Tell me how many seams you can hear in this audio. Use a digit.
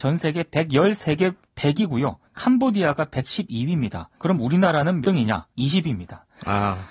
5